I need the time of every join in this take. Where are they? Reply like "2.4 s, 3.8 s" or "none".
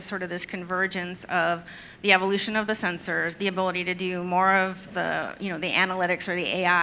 none